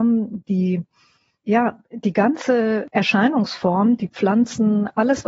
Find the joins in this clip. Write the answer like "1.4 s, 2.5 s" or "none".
none